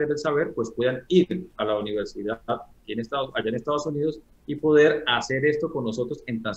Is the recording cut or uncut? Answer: uncut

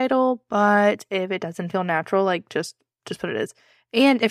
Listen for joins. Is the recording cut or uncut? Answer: uncut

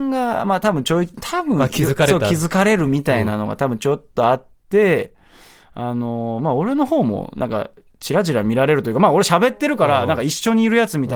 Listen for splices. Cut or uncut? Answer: uncut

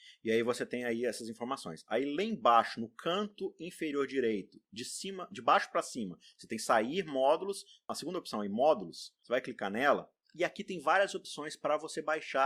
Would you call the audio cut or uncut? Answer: uncut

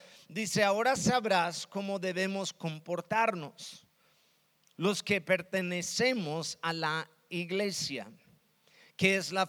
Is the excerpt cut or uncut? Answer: uncut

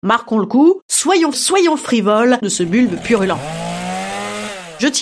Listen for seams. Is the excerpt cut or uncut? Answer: cut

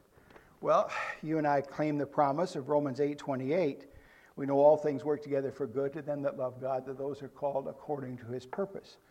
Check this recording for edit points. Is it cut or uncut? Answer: uncut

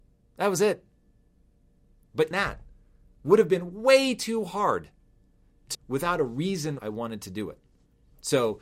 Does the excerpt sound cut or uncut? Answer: cut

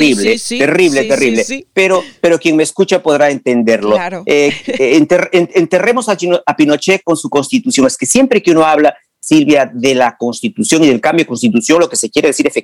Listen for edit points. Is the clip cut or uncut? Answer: uncut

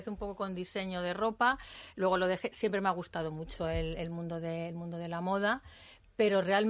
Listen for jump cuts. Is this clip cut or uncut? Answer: uncut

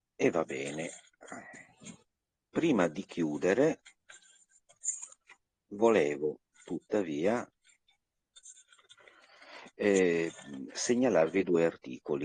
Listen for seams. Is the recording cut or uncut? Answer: uncut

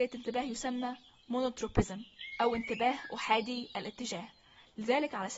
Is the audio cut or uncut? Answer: uncut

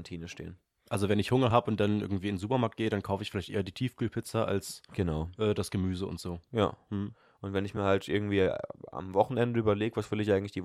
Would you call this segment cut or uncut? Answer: uncut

